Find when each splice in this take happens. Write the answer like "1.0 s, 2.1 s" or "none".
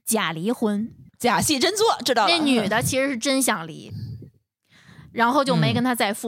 none